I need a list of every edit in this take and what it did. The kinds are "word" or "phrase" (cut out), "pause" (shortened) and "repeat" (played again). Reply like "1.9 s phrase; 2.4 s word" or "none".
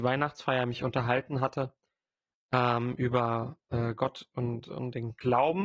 none